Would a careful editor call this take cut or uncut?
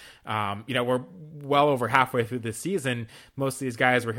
uncut